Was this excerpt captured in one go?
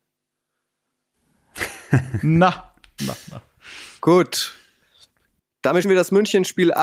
no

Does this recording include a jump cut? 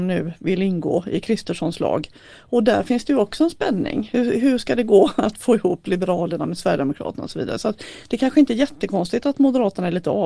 no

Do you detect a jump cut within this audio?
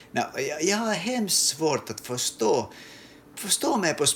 no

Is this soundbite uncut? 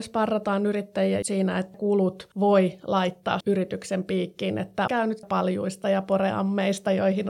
no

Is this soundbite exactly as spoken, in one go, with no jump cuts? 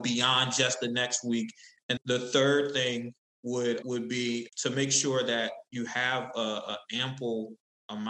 no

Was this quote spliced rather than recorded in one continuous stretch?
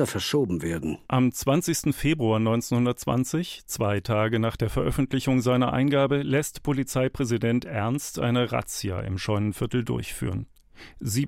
yes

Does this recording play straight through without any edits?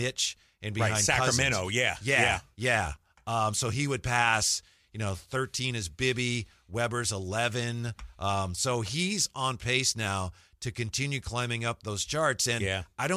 yes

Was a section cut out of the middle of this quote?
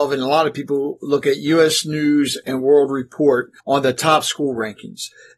yes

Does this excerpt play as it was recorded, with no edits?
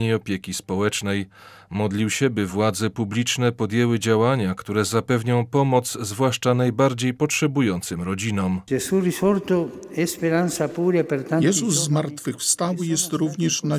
yes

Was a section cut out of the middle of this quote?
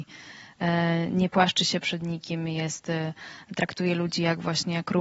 no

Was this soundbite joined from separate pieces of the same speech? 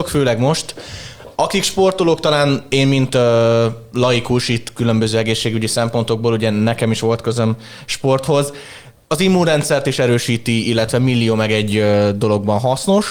no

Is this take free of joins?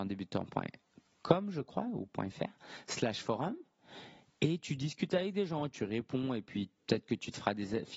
yes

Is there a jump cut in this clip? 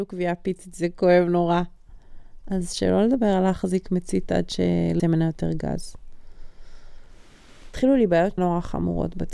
yes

